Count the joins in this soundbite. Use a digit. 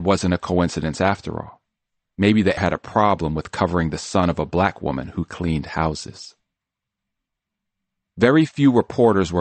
1